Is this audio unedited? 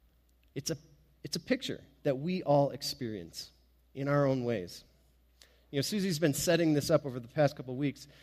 yes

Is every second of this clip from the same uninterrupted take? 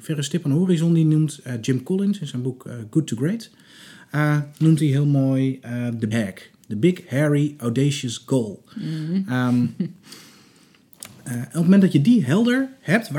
no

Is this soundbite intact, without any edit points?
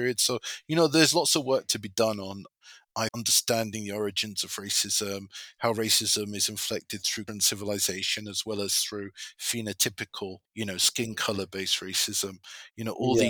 no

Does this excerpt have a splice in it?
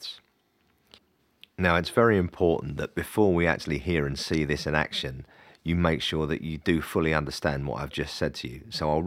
no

